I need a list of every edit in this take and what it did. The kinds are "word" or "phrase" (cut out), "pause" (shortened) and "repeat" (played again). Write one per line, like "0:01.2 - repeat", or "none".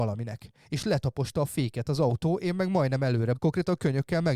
0:03.3 - word